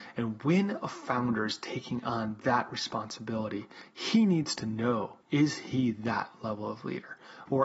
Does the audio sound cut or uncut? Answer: cut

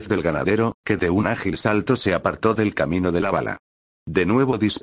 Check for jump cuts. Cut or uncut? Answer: uncut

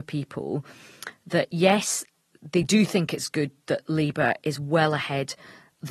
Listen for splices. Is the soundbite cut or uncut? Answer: uncut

